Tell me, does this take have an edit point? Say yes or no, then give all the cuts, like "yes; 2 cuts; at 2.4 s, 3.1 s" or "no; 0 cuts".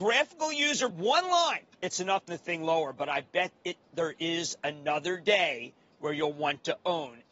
yes; 3 cuts; at 0.9 s, 1.7 s, 2.3 s